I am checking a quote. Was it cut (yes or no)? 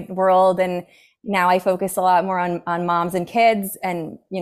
no